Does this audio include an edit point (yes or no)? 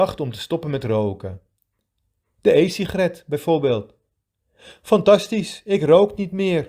no